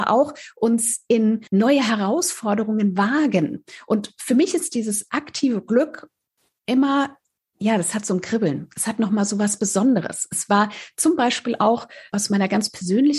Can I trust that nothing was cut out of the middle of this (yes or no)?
no